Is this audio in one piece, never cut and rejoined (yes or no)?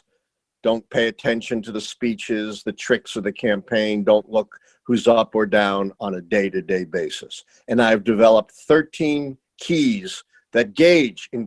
yes